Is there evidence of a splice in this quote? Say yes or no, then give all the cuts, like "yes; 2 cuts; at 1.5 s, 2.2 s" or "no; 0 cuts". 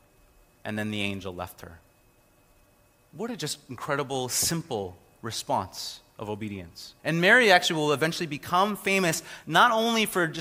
yes; 1 cut; at 7.0 s